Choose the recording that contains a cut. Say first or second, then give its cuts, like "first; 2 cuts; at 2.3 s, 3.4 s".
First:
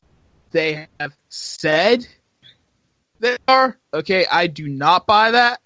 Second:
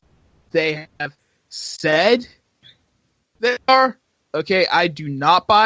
first; 2 cuts; at 1.2 s, 3.8 s